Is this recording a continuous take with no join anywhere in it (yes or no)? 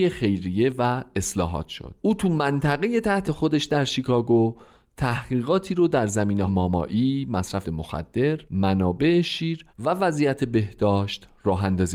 no